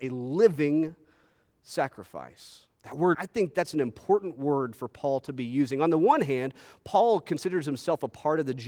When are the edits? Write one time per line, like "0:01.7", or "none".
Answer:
0:02.7
0:03.1